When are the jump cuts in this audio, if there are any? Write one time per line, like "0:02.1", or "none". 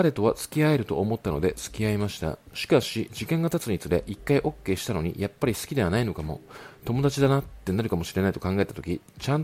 0:02.4